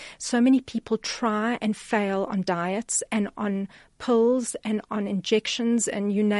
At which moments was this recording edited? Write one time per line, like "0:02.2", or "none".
none